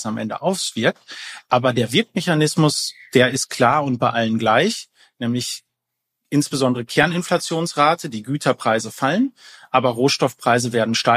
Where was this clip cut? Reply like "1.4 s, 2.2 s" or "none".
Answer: none